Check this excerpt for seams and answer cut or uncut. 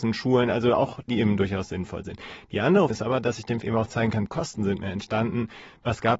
cut